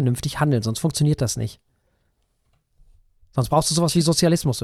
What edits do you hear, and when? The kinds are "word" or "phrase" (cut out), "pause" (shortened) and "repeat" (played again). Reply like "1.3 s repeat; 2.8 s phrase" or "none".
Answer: none